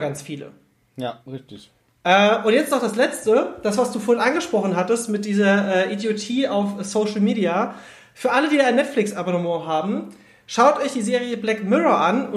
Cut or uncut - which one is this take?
uncut